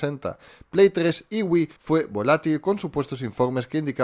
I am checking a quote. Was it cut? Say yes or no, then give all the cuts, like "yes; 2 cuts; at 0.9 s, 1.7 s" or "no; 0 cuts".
yes; 1 cut; at 1.8 s